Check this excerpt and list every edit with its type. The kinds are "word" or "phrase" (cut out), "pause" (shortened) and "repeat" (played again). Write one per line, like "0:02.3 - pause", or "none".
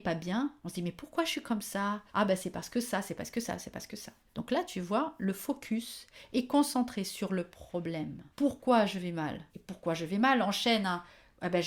0:02.1 - pause
0:04.3 - pause
0:08.3 - pause
0:09.5 - pause